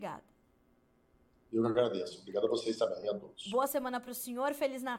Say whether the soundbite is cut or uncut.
uncut